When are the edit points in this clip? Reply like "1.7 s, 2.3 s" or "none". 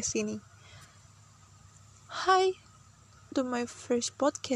3.3 s

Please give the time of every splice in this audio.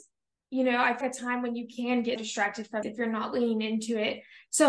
1.0 s, 2.2 s, 2.8 s

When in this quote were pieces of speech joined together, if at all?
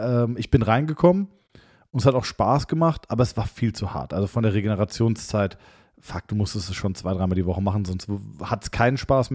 none

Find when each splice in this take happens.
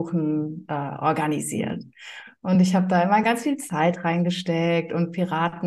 none

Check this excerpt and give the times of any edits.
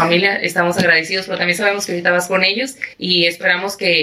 2.9 s

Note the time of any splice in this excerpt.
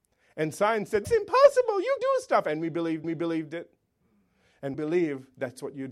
1.0 s, 2.0 s, 3.0 s, 4.7 s

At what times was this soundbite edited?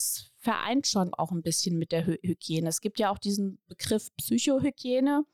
1.1 s

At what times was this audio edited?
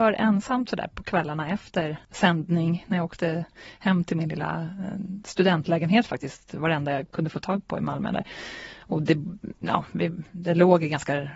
2.0 s

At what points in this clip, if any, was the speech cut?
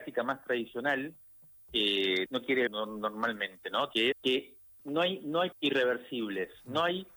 2.3 s, 2.7 s, 4.1 s, 4.8 s, 5.5 s

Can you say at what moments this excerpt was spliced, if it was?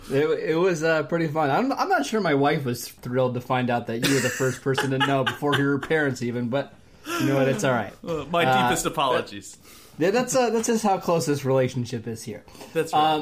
3.0 s

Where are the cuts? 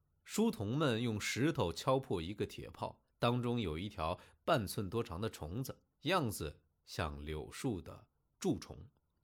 3.1 s, 5.9 s

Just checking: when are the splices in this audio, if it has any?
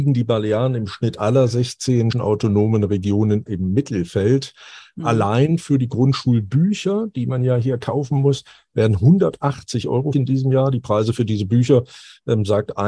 2.1 s, 3.5 s, 10.1 s

